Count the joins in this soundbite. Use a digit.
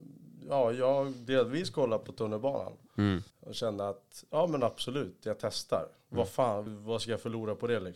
2